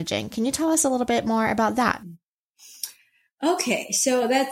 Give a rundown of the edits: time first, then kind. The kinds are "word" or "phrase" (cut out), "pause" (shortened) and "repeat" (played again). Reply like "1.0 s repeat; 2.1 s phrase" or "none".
none